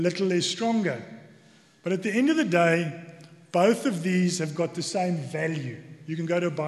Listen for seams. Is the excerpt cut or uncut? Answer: uncut